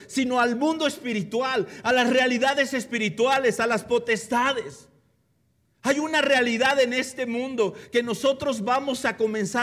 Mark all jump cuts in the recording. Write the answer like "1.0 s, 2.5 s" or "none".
none